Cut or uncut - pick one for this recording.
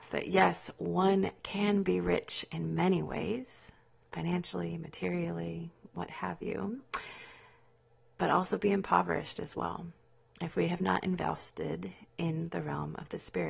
uncut